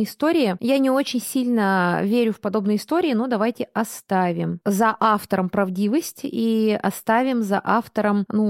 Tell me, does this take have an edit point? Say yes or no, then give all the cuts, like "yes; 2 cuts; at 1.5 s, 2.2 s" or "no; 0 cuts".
no; 0 cuts